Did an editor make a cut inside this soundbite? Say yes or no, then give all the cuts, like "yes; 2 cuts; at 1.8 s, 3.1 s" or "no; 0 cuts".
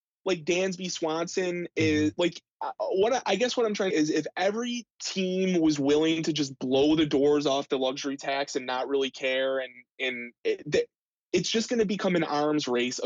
yes; 3 cuts; at 3.9 s, 4.9 s, 10.4 s